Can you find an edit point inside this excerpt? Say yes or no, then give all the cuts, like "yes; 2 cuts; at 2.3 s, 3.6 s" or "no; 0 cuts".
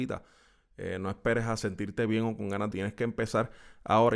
yes; 1 cut; at 2.7 s